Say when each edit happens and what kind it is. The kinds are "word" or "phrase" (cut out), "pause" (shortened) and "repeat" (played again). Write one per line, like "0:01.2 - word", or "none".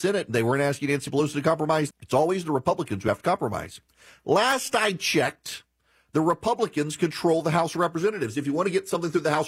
0:01.9 - phrase